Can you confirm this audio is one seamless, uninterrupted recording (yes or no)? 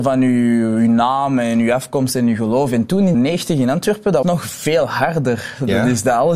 no